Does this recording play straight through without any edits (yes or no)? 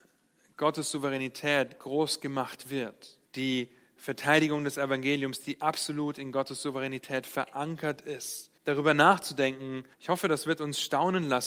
no